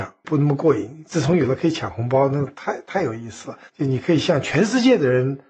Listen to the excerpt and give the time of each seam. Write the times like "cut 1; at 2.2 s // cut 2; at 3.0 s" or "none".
cut 1; at 3.7 s